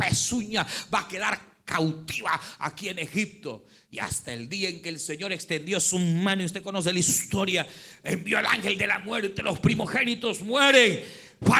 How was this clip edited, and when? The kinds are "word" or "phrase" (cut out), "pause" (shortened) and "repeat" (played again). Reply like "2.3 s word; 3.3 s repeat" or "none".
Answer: none